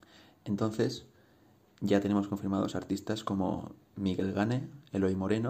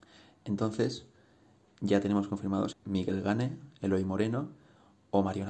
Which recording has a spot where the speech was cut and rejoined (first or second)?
second